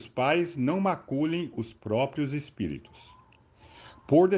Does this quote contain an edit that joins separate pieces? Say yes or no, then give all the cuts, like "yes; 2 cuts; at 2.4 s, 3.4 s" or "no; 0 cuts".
no; 0 cuts